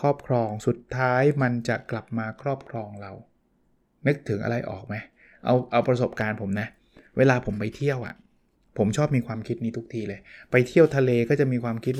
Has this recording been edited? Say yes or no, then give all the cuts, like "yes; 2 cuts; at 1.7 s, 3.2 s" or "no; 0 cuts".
no; 0 cuts